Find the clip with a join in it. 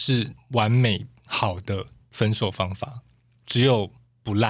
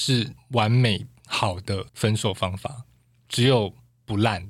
second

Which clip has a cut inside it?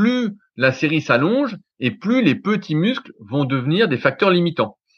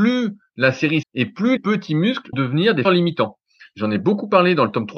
second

